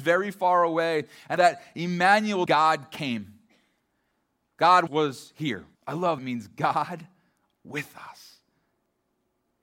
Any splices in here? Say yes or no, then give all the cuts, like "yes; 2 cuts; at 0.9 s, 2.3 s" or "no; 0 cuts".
yes; 5 cuts; at 1.4 s, 2.5 s, 4.9 s, 5.7 s, 6.2 s